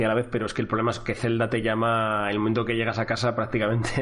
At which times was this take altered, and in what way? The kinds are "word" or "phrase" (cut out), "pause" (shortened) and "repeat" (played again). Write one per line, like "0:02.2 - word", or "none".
none